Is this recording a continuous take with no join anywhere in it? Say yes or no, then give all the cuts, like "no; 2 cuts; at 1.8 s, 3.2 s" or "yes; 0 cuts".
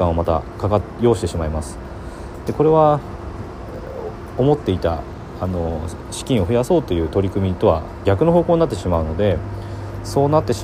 no; 1 cut; at 8.0 s